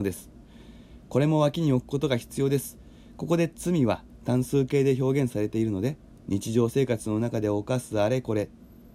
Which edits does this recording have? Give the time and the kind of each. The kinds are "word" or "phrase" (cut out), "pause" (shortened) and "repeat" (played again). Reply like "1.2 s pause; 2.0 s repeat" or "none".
6.1 s pause